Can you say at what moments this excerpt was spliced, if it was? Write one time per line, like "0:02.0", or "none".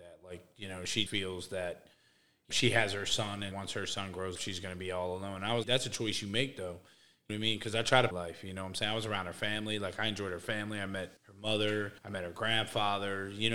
0:01.1
0:02.5
0:03.5
0:04.4
0:05.6
0:07.3
0:08.1
0:11.2
0:12.0